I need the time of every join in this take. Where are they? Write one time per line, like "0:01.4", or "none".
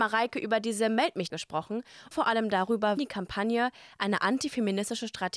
0:01.3
0:02.1
0:03.0